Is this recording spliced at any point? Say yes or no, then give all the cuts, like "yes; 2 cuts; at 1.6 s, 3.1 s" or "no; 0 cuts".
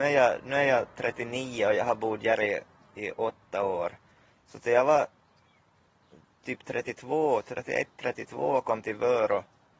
no; 0 cuts